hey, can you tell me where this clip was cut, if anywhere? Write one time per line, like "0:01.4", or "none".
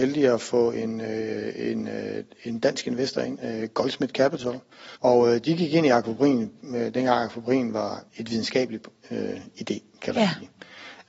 0:04.9
0:08.1